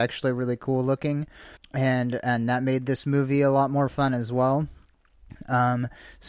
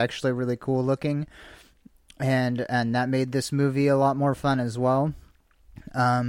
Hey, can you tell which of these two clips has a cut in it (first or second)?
first